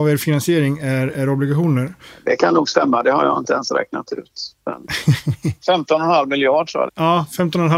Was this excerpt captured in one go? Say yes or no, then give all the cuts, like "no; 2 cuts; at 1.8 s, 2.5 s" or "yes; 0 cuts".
no; 1 cut; at 6.9 s